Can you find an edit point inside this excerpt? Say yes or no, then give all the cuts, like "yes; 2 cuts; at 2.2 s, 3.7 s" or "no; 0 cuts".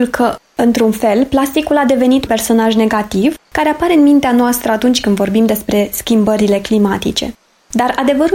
yes; 2 cuts; at 2.3 s, 3.4 s